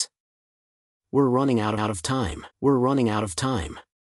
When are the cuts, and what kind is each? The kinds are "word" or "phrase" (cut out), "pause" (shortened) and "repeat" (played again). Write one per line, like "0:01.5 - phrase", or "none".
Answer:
0:01.8 - repeat
0:02.5 - pause